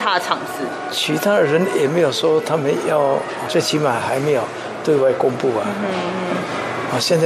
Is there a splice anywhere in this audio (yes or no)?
yes